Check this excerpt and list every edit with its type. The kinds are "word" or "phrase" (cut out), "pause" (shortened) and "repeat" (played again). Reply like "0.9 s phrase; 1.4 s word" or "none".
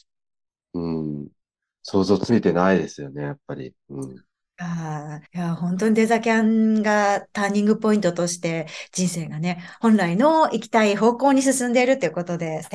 1.4 s pause; 5.3 s pause